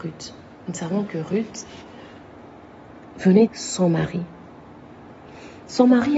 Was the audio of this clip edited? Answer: yes; 1 cut; at 3.5 s

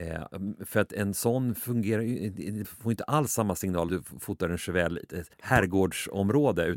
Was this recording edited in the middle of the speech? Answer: yes; 4 cuts; at 2.6 s, 3.9 s, 5.0 s, 5.3 s

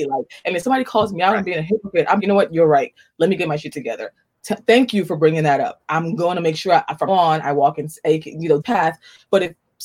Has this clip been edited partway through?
yes; 3 cuts; at 2.2 s, 7.1 s, 8.6 s

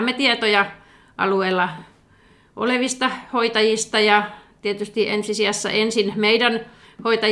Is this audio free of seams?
yes; 0 cuts

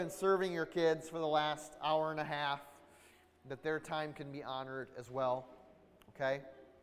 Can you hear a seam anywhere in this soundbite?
no; 0 cuts

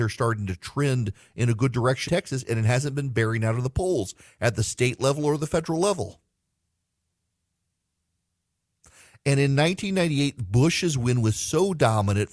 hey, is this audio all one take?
no; 1 cut; at 2.1 s

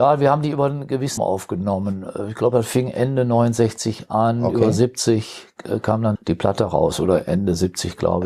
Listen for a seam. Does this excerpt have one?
yes; 2 cuts; at 1.2 s, 6.2 s

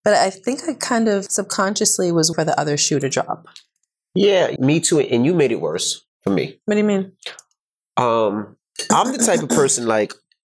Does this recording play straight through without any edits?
no; 3 cuts; at 1.3 s, 2.3 s, 4.6 s

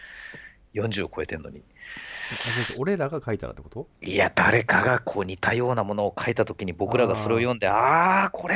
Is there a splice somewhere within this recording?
yes; 1 cut; at 3.9 s

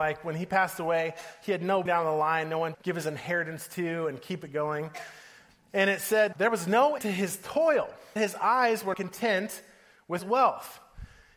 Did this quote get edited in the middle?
yes; 7 cuts; at 1.9 s, 2.7 s, 6.3 s, 7.0 s, 8.2 s, 8.9 s, 10.2 s

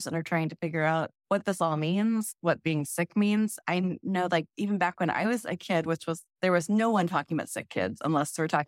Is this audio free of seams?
yes; 0 cuts

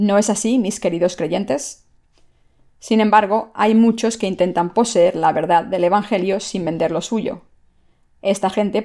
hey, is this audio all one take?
yes; 0 cuts

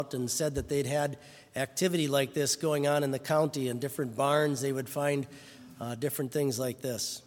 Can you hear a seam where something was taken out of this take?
no; 0 cuts

